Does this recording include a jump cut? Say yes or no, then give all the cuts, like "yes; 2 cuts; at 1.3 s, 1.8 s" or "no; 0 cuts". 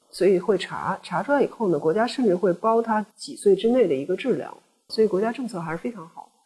yes; 2 cuts; at 3.1 s, 4.9 s